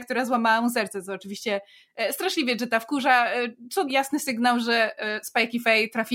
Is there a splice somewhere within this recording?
yes; 1 cut; at 3.9 s

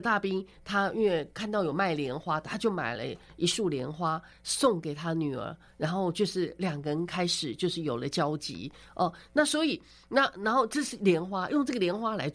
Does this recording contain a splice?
no; 0 cuts

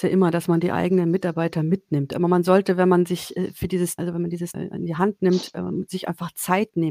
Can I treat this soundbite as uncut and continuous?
no; 2 cuts; at 4.0 s, 4.5 s

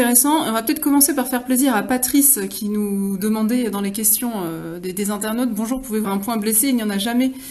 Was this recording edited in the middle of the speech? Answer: yes; 1 cut; at 6.0 s

